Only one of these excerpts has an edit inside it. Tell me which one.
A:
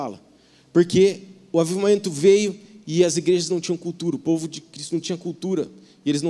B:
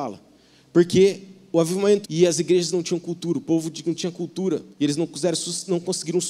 B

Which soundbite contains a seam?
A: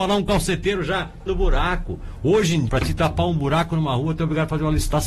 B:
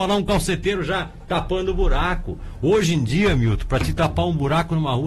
A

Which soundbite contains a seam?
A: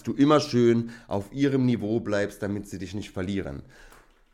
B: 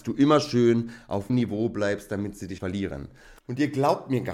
B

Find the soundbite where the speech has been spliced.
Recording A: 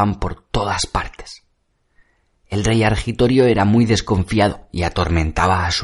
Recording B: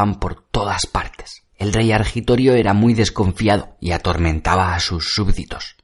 B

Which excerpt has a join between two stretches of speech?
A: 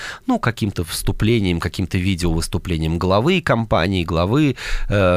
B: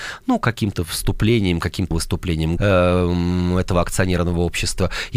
B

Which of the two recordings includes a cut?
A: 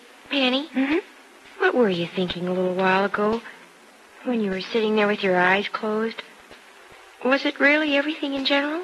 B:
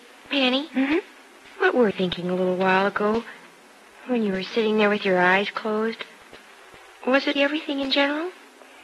B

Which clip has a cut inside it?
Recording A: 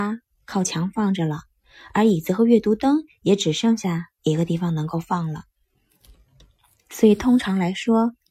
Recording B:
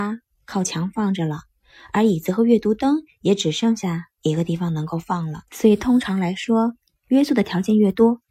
B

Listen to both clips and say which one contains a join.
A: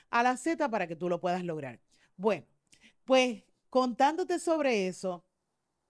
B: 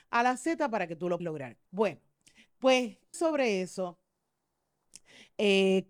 B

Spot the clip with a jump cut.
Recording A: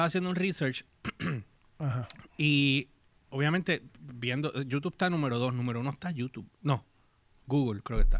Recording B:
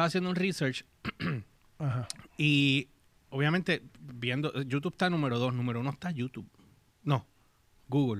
A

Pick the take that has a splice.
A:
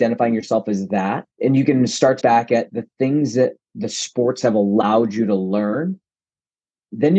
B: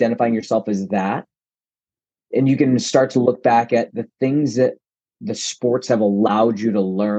A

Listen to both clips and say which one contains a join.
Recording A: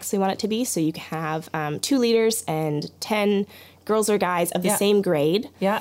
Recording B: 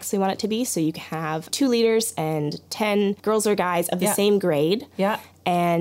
B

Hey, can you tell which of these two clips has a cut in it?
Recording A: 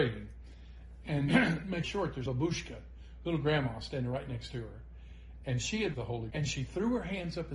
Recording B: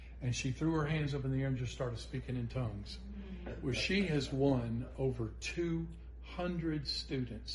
A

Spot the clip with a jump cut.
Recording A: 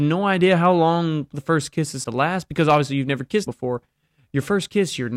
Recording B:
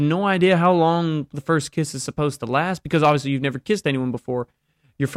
A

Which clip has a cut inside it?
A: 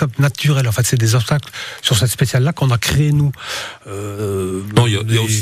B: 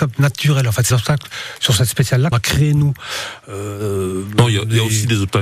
B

